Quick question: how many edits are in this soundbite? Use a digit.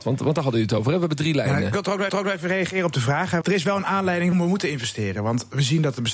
3